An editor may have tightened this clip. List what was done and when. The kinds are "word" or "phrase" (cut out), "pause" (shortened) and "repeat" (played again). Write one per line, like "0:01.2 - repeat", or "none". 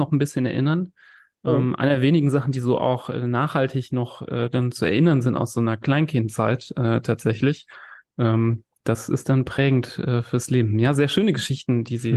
none